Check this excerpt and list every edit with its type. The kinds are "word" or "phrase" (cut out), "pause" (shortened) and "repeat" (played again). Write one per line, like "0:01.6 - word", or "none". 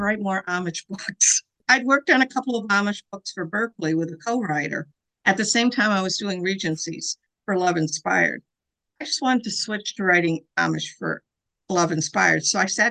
none